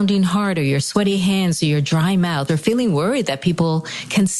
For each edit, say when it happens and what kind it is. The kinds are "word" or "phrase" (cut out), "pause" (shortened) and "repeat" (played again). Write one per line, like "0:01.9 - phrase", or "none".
0:02.5 - phrase